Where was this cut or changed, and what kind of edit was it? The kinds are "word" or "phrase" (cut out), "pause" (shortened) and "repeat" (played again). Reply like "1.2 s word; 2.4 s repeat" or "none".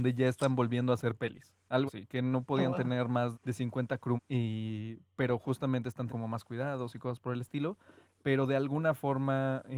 1.9 s word; 3.3 s word; 4.2 s word; 6.1 s word

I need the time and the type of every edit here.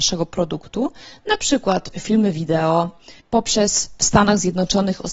1.9 s word; 3.2 s pause

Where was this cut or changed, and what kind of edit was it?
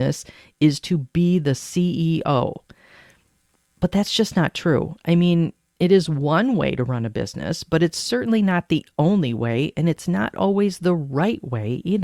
none

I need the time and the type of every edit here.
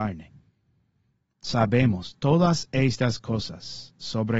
none

